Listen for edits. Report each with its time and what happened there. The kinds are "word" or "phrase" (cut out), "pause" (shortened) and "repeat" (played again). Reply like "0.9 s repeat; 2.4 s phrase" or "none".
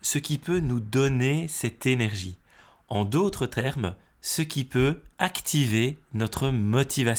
none